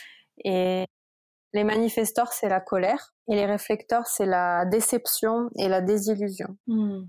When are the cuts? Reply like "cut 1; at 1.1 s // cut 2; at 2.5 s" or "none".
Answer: cut 1; at 3.2 s